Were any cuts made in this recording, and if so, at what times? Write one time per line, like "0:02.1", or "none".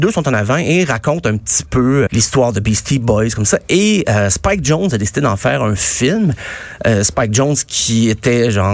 0:02.1